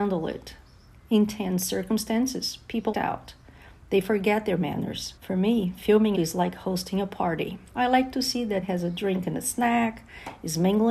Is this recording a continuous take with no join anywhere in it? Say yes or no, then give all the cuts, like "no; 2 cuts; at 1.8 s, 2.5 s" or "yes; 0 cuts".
no; 5 cuts; at 2.9 s, 5.2 s, 6.1 s, 7.7 s, 8.6 s